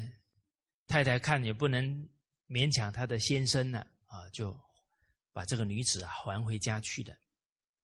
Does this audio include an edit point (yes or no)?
no